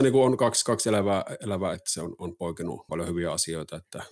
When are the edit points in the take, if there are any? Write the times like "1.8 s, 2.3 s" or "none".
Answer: 1.7 s, 2.9 s